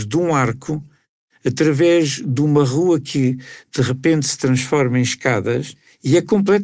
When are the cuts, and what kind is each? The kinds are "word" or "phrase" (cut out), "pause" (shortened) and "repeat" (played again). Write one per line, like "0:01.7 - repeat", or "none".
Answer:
none